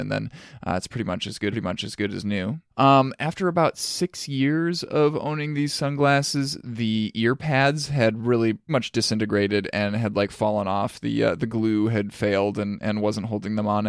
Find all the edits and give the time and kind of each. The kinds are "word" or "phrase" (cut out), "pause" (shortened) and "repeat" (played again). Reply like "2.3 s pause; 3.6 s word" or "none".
1.5 s repeat; 2.7 s pause; 8.7 s word